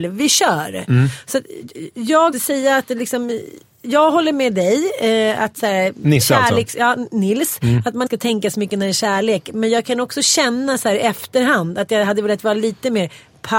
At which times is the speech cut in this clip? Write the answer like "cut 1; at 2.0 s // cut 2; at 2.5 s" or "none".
cut 1; at 2.3 s // cut 2; at 8.1 s